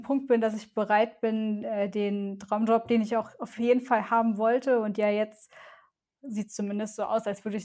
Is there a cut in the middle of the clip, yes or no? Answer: no